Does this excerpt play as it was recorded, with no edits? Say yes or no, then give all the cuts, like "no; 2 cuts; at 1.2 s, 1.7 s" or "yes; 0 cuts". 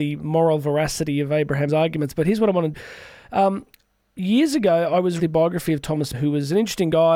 no; 4 cuts; at 1.7 s, 2.7 s, 5.2 s, 6.1 s